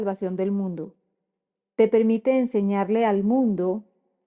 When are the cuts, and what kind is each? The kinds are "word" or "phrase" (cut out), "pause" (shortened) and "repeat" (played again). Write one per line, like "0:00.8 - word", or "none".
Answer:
none